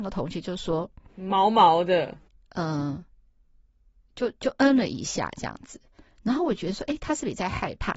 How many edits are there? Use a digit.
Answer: 0